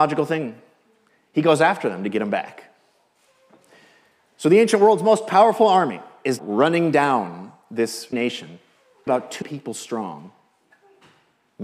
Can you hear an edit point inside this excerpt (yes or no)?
yes